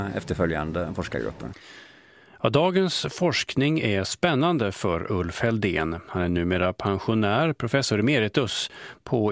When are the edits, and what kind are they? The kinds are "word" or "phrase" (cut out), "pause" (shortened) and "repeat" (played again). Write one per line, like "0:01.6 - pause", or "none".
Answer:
none